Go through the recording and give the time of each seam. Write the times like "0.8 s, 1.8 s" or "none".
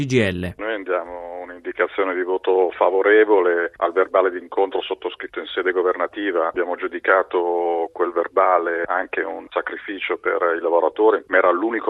none